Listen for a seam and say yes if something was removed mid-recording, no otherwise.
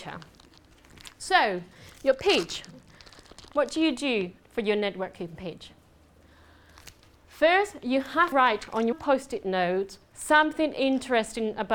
yes